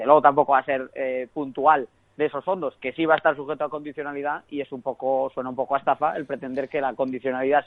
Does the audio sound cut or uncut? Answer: uncut